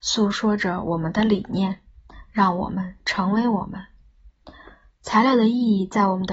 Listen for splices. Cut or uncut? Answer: uncut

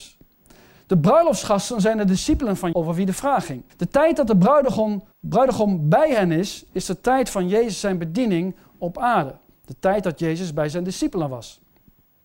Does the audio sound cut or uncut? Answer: cut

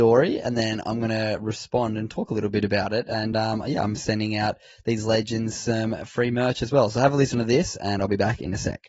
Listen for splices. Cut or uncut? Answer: uncut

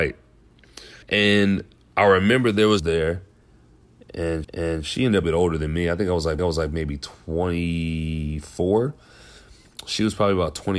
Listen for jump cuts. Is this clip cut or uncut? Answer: cut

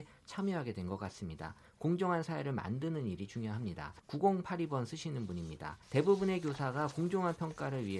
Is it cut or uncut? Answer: cut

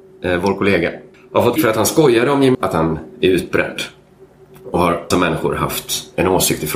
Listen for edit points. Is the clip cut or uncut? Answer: cut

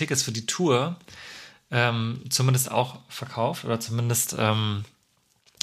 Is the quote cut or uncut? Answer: uncut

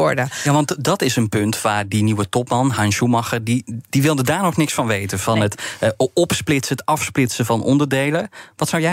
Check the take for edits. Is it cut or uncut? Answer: uncut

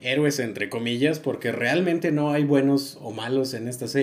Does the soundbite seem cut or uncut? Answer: uncut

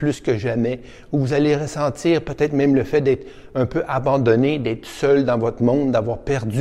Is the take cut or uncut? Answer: uncut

